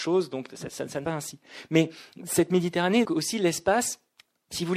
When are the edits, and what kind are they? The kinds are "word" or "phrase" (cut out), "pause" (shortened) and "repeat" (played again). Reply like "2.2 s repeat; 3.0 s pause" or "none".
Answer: 1.0 s phrase; 3.0 s word